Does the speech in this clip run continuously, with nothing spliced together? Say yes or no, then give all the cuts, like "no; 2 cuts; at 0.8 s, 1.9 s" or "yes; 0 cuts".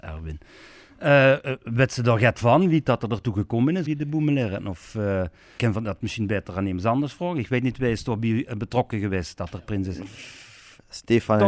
no; 2 cuts; at 3.9 s, 5.6 s